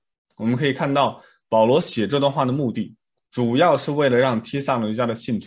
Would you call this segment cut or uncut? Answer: uncut